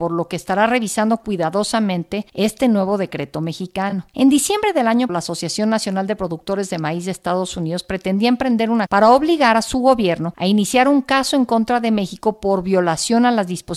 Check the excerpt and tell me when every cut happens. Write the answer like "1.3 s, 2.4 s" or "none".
5.1 s, 8.9 s